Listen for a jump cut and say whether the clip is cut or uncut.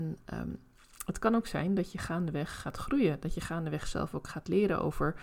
uncut